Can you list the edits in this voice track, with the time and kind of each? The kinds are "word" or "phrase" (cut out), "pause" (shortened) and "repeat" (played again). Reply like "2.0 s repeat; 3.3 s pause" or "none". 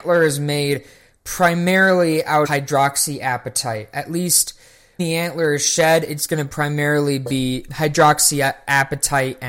2.4 s word; 5.0 s word; 7.7 s word